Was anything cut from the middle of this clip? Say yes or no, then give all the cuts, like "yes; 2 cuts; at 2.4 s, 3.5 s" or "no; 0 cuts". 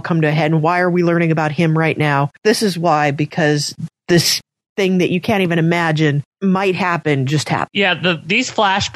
no; 0 cuts